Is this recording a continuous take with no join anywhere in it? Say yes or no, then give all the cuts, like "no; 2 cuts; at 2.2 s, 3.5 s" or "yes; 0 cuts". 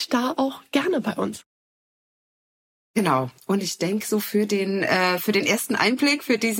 yes; 0 cuts